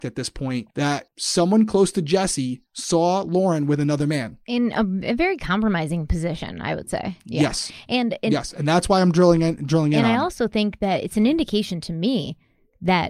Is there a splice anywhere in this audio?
yes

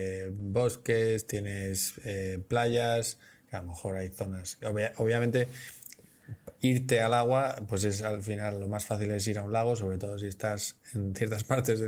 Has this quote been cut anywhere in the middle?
no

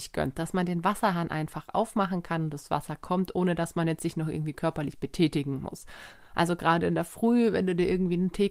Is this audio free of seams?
yes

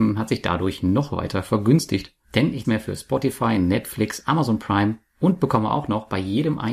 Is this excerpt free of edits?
no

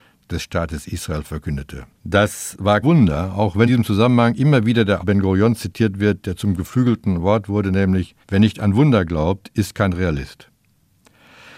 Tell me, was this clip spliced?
yes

